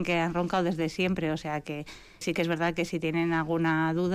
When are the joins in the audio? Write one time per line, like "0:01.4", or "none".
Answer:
none